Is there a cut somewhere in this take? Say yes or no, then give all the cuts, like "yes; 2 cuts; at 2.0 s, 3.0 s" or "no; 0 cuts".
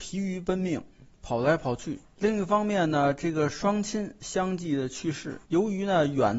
yes; 2 cuts; at 2.0 s, 5.4 s